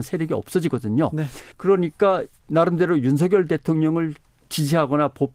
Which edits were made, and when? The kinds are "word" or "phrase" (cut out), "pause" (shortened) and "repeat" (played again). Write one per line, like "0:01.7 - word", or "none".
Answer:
0:01.5 - pause

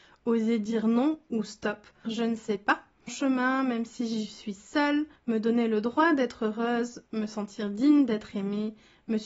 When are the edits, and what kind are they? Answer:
0:02.0 - phrase
0:03.1 - phrase
0:05.2 - pause

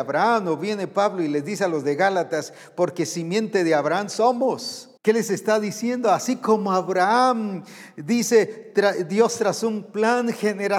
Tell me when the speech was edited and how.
0:05.0 - pause

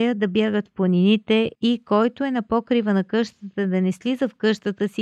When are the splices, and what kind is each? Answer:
0:01.5 - pause

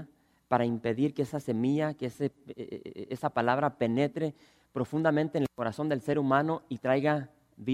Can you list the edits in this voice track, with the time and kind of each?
none

